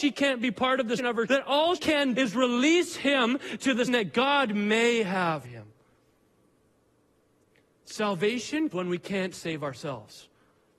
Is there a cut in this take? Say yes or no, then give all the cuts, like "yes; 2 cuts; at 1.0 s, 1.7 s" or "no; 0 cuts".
yes; 7 cuts; at 1.0 s, 1.3 s, 1.8 s, 2.1 s, 3.9 s, 5.4 s, 8.7 s